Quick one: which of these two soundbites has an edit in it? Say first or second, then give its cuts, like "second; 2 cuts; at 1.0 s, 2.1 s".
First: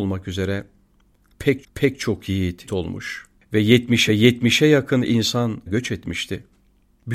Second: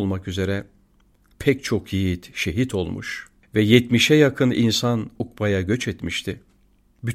first; 4 cuts; at 1.6 s, 2.7 s, 4.1 s, 5.7 s